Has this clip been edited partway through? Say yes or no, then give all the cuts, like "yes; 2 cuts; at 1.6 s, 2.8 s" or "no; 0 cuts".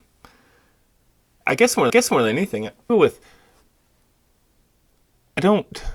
yes; 3 cuts; at 1.4 s, 1.9 s, 2.9 s